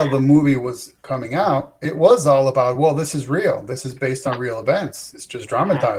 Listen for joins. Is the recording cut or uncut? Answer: uncut